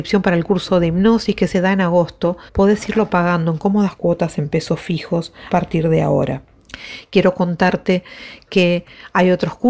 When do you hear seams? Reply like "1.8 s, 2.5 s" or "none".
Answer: 1.5 s, 2.5 s, 5.5 s